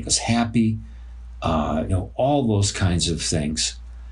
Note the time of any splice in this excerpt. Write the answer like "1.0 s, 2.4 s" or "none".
1.9 s